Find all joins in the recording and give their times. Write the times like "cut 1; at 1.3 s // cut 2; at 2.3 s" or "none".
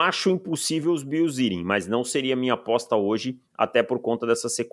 none